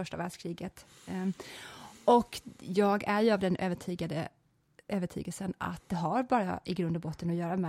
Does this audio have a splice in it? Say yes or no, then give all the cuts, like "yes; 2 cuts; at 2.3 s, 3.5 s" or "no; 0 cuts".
no; 0 cuts